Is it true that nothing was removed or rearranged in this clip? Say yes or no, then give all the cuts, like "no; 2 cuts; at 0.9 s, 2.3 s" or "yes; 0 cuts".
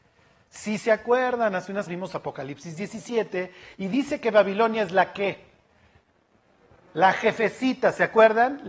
no; 1 cut; at 1.9 s